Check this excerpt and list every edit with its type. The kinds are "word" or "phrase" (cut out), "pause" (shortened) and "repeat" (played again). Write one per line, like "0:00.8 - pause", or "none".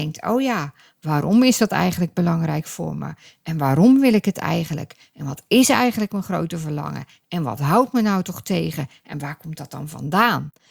none